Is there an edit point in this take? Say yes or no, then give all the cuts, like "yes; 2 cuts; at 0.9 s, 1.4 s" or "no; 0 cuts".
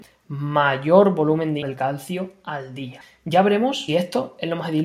yes; 2 cuts; at 1.6 s, 3.9 s